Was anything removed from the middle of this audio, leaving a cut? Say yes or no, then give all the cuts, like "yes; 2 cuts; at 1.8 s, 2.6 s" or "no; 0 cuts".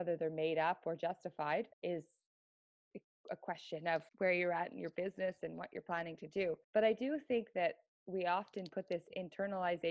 yes; 3 cuts; at 1.7 s, 4.1 s, 6.6 s